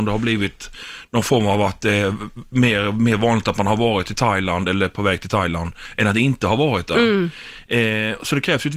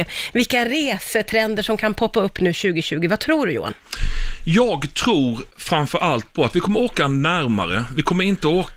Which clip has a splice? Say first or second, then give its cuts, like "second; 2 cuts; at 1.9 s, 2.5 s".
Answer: second; 1 cut; at 5.5 s